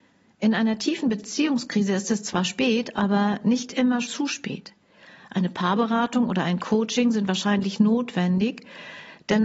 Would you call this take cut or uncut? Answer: cut